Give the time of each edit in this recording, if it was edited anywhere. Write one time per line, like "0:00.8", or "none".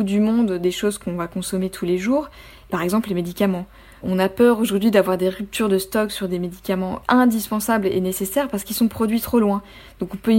none